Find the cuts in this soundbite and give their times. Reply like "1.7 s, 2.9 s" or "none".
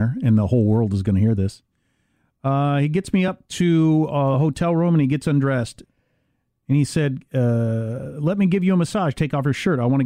none